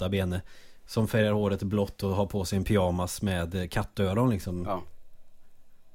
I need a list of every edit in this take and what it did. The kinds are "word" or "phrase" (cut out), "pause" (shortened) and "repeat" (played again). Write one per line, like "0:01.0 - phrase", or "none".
none